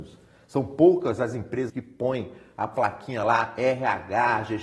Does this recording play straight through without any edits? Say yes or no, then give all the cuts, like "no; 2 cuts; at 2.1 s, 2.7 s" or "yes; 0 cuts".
no; 1 cut; at 1.7 s